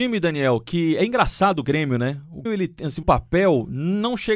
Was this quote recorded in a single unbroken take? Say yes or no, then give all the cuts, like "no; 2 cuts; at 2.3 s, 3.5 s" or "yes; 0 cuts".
no; 2 cuts; at 2.5 s, 3.0 s